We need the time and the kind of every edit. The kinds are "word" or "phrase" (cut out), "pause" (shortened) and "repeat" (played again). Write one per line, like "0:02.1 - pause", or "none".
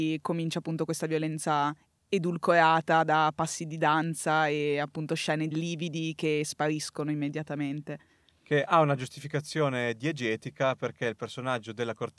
0:05.5 - word